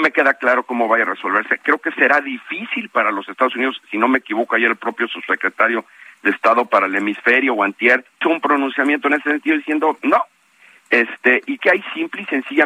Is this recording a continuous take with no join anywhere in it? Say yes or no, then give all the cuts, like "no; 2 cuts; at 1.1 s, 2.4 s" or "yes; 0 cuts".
no; 2 cuts; at 8.2 s, 11.6 s